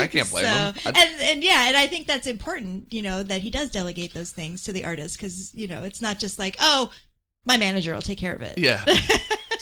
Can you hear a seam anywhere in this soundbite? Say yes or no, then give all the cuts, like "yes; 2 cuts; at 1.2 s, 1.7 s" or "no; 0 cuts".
no; 0 cuts